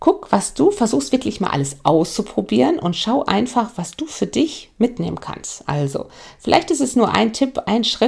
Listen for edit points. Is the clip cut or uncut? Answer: uncut